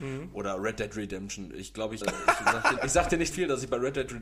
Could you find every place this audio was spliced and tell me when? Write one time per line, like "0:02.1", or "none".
0:02.0
0:02.8
0:03.3